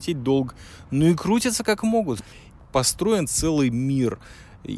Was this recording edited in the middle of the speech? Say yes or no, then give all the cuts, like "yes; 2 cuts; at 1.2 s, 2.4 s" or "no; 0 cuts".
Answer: no; 0 cuts